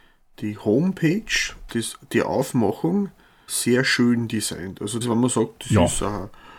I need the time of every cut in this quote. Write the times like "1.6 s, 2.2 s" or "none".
1.7 s, 3.5 s, 5.0 s